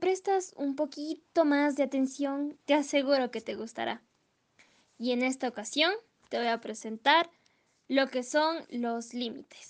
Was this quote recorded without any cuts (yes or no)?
yes